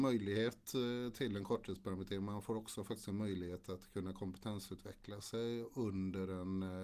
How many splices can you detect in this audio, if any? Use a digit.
0